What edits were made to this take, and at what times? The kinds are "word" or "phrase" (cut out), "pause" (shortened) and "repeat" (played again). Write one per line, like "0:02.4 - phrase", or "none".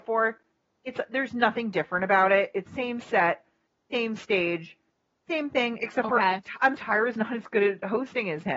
0:02.7 - word
0:06.8 - word